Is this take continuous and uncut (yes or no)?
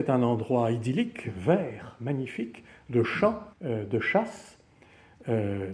no